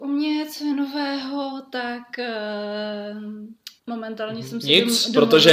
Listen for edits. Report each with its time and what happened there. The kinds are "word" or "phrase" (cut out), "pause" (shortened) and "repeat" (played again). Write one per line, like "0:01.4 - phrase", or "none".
0:03.8 - pause